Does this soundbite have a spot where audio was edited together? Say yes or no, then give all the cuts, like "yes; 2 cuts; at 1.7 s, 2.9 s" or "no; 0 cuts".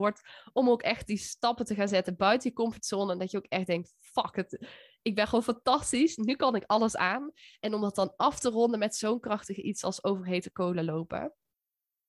no; 0 cuts